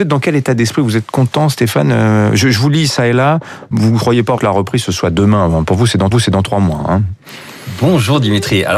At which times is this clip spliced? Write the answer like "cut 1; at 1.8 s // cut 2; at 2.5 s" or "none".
cut 1; at 3.7 s // cut 2; at 4.4 s // cut 3; at 6.1 s